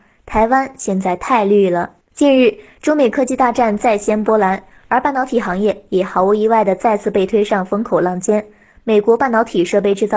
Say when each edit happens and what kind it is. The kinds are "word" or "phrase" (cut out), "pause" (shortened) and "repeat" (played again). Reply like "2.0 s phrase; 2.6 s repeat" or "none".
2.0 s pause